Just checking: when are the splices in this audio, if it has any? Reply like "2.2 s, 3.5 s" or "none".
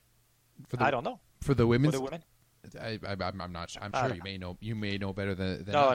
1.3 s, 3.9 s